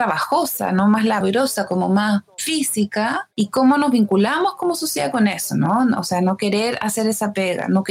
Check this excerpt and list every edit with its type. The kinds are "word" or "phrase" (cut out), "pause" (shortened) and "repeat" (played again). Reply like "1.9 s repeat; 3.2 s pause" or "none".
3.3 s pause